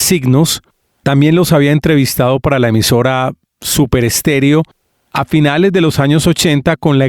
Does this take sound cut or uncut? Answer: uncut